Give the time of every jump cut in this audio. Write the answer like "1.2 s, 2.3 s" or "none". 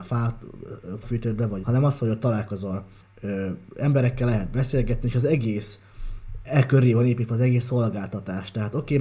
1.0 s, 1.6 s, 3.0 s, 6.4 s